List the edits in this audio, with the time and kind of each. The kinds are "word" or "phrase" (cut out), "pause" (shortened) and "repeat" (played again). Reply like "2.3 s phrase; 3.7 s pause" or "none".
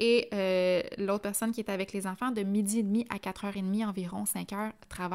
none